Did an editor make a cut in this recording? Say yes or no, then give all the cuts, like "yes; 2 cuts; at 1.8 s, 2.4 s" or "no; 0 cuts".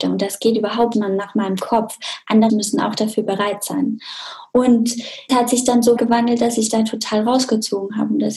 yes; 5 cuts; at 0.9 s, 2.5 s, 5.3 s, 6.0 s, 6.7 s